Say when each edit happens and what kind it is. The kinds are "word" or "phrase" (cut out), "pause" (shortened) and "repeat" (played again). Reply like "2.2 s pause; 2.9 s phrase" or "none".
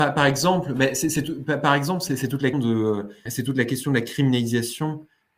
2.5 s word; 3.3 s word